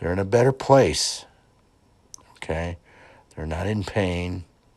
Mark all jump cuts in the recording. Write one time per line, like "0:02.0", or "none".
none